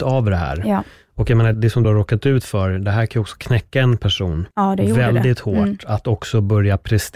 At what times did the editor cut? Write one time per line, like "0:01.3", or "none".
0:01.5
0:01.8
0:04.5

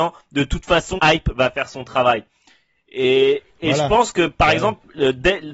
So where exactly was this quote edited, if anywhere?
0:01.0

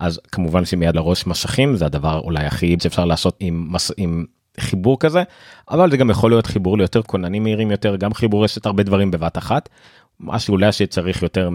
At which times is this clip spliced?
0:00.9
0:02.8
0:03.4
0:07.0

